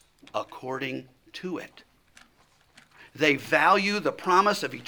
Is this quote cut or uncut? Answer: uncut